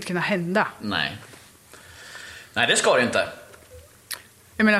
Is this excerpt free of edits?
yes; 0 cuts

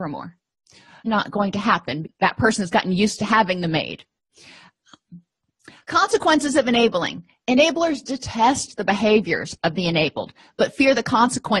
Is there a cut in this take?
yes; 2 cuts; at 1.1 s, 2.0 s

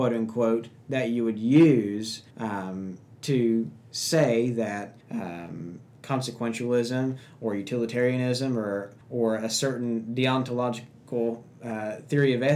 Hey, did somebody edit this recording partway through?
yes; 3 cuts; at 2.3 s, 5.0 s, 9.0 s

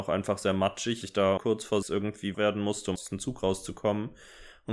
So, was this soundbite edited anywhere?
yes; 5 cuts; at 1.0 s, 1.4 s, 1.8 s, 2.3 s, 3.0 s

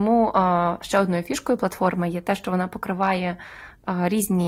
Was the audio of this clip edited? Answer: no; 0 cuts

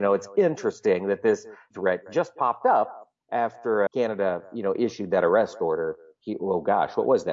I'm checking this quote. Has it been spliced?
yes; 2 cuts; at 1.7 s, 3.9 s

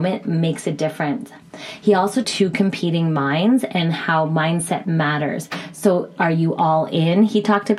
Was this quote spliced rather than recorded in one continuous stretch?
yes; 1 cut; at 2.2 s

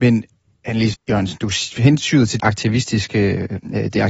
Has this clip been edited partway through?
yes; 3 cuts; at 0.9 s, 1.4 s, 2.4 s

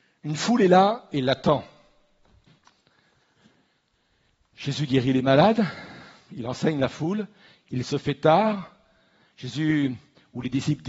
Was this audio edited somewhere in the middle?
no; 0 cuts

